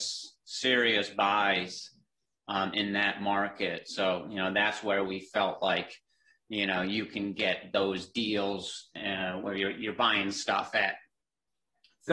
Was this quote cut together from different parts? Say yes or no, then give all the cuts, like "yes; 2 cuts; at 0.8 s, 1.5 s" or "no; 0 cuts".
no; 0 cuts